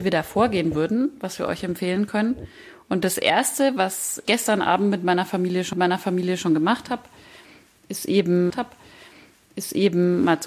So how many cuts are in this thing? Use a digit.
3